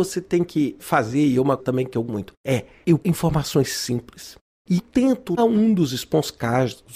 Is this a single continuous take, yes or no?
no